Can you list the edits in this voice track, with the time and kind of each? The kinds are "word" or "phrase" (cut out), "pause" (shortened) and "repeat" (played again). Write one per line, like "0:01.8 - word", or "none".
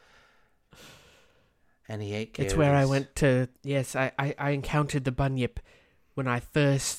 0:03.6 - pause